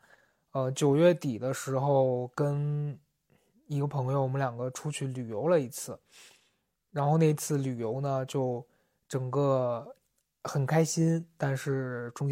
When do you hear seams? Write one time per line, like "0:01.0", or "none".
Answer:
none